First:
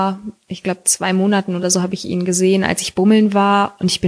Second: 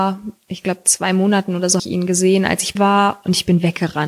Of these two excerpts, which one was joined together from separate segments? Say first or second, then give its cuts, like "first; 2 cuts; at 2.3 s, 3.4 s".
second; 2 cuts; at 1.8 s, 2.8 s